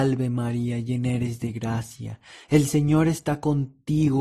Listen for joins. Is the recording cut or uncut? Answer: uncut